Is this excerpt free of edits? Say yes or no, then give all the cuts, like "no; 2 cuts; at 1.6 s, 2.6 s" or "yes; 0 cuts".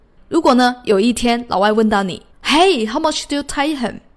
no; 1 cut; at 2.3 s